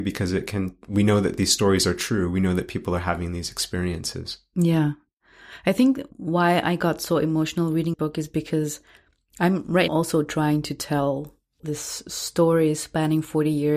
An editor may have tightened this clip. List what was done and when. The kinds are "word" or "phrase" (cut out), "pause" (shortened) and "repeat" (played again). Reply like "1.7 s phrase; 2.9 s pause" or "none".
7.9 s word; 9.9 s word